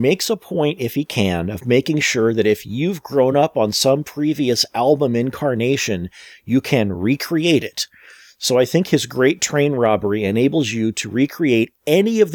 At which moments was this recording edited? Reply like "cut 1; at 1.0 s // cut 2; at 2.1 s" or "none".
none